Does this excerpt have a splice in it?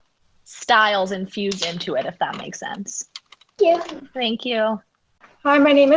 yes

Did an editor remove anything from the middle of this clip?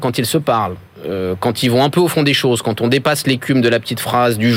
no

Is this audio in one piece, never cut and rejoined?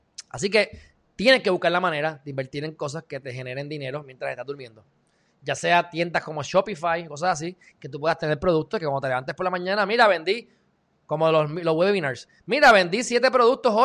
yes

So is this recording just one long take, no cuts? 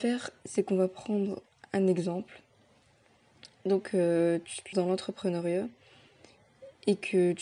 no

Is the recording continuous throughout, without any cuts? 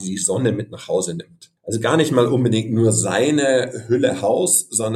no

